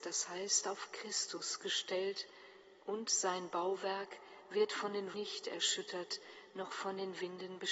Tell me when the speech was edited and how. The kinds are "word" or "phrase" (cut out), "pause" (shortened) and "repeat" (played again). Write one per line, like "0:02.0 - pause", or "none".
0:02.8 - pause
0:05.1 - word

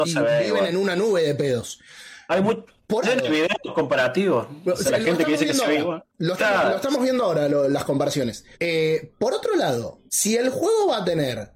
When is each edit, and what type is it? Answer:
0:03.0 - phrase
0:08.5 - pause
0:10.1 - pause

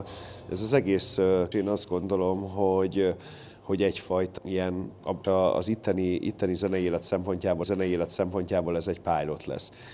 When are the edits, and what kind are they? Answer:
0:01.5 - word
0:04.4 - word
0:05.2 - phrase
0:07.6 - repeat

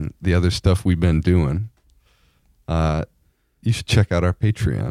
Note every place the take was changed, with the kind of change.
none

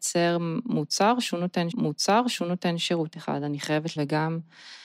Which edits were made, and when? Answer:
0:01.7 - repeat
0:04.0 - phrase

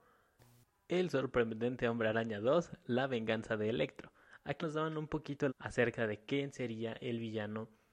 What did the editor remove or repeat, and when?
0:04.6 - word
0:05.5 - word

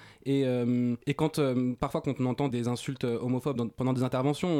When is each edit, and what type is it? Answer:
0:01.0 - pause
0:02.5 - word
0:03.6 - word

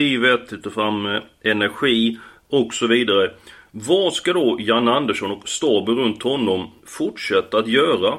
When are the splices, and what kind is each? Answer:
none

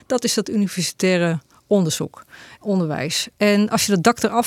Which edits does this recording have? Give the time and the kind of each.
0:02.6 - word

